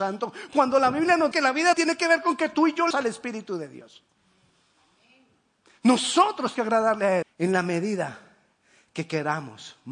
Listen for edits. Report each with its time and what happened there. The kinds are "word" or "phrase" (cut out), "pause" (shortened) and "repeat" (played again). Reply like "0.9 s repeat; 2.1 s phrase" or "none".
1.3 s word; 1.7 s word; 2.9 s word; 6.5 s word; 7.2 s word